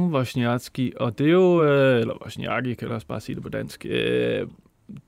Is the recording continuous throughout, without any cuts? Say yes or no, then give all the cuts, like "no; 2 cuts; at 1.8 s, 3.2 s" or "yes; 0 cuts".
yes; 0 cuts